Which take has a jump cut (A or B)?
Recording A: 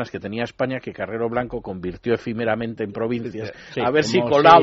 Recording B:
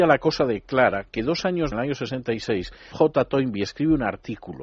B